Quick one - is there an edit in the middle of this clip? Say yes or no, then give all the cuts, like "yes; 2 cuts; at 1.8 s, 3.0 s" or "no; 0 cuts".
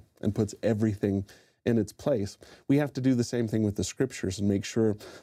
no; 0 cuts